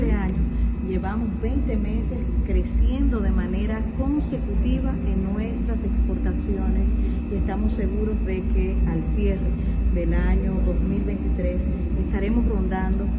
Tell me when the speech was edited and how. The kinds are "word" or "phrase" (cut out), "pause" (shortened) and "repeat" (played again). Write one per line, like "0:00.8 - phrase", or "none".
none